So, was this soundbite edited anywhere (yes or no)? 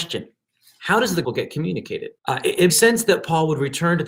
yes